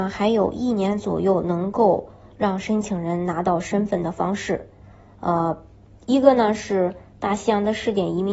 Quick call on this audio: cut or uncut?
uncut